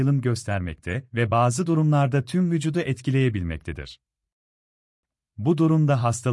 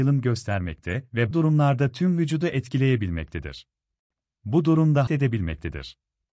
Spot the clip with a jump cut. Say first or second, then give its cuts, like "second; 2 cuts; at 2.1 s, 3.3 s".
second; 3 cuts; at 1.3 s, 4.0 s, 5.1 s